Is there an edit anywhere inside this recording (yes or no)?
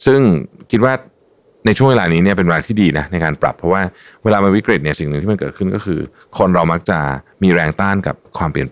no